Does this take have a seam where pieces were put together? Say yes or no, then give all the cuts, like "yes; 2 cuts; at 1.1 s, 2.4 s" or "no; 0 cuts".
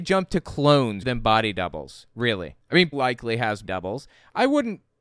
yes; 3 cuts; at 1.0 s, 2.9 s, 3.6 s